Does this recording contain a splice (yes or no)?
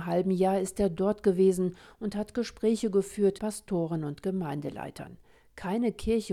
yes